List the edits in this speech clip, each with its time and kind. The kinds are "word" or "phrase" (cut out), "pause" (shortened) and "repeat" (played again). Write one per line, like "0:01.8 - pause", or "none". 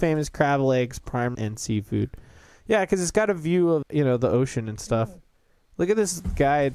0:01.3 - word
0:03.8 - word